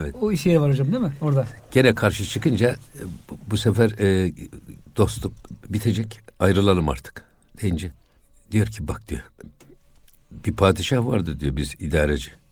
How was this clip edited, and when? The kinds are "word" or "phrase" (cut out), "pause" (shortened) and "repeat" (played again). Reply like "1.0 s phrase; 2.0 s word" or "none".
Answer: none

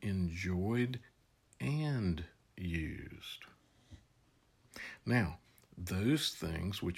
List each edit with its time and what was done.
none

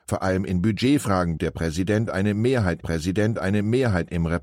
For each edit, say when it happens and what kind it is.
1.4 s word; 2.8 s repeat

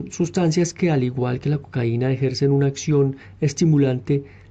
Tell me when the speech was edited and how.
none

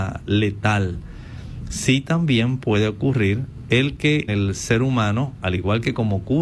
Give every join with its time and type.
4.3 s word

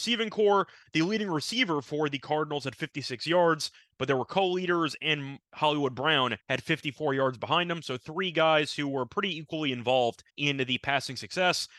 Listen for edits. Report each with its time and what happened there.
6.4 s pause; 10.3 s pause

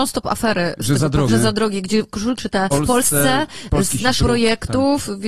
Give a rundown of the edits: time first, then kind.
1.3 s word; 2.4 s word; 2.7 s word; 4.2 s word

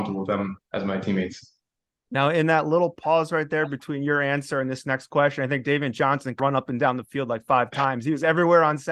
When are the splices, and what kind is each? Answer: 1.8 s pause; 6.4 s word

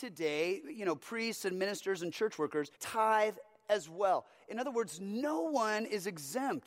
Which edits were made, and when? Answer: 2.7 s pause

